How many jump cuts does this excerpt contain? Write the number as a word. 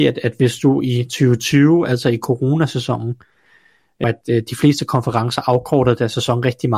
one